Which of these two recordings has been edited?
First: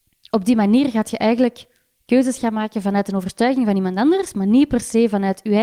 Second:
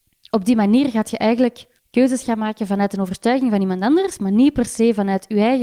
second; 1 cut; at 1.8 s

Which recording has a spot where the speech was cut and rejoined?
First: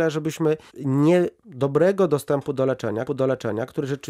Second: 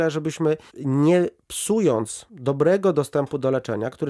first; 2 cuts; at 1.4 s, 3.1 s

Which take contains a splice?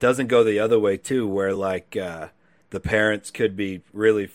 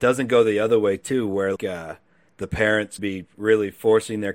second; 2 cuts; at 1.6 s, 3.0 s

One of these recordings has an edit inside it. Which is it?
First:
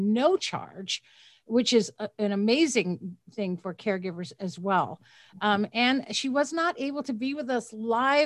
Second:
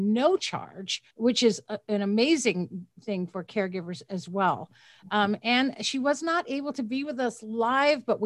second; 1 cut; at 1.1 s

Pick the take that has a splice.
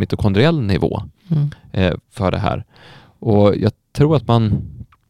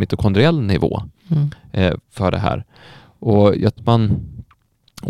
second; 1 cut; at 3.8 s

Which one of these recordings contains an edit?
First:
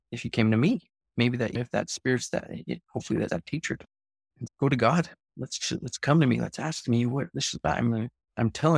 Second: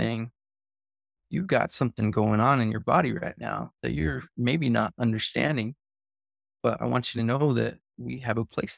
first; 3 cuts; at 1.5 s, 3.3 s, 4.5 s

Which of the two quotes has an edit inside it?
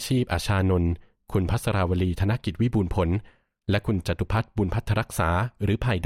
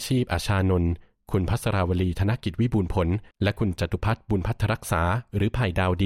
second; 1 cut; at 3.3 s

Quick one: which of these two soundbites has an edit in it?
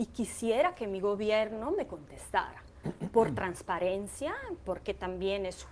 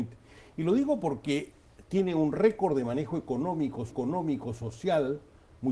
second; 1 cut; at 3.9 s

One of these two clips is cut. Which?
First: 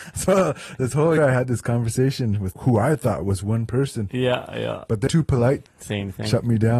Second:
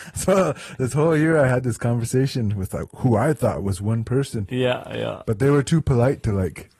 first; 4 cuts; at 1.2 s, 2.5 s, 5.1 s, 5.7 s

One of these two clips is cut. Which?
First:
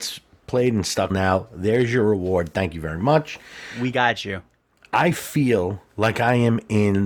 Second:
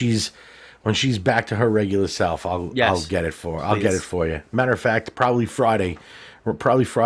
first; 2 cuts; at 1.1 s, 5.9 s

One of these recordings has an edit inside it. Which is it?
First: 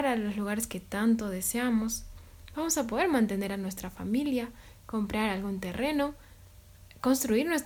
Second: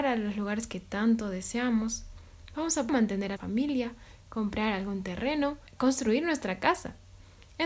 second; 3 cuts; at 2.9 s, 3.4 s, 5.7 s

